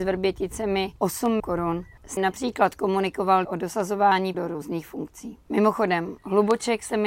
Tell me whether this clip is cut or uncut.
cut